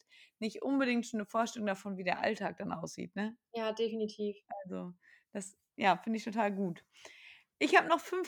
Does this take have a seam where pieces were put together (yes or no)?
no